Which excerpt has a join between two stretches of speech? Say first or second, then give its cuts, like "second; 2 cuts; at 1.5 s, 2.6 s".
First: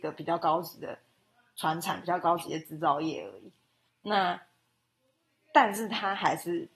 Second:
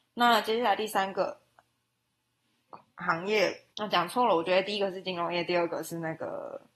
second; 1 cut; at 3.7 s